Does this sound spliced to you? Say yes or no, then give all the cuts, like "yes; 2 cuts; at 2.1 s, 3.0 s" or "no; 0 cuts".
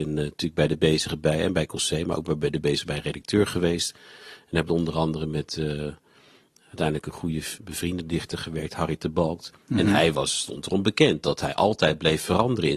yes; 1 cut; at 7.6 s